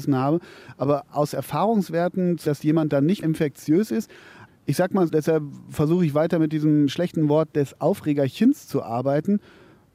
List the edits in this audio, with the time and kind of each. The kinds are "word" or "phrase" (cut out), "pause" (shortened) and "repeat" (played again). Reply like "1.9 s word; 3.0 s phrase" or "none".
2.5 s word; 3.2 s word; 4.5 s word; 5.1 s word